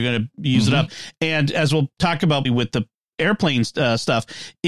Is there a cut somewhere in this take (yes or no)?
yes